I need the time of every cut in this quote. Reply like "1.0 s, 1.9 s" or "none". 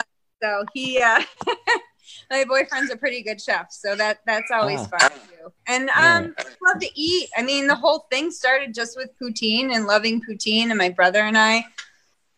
6.5 s